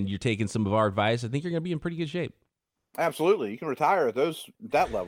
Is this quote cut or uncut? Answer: uncut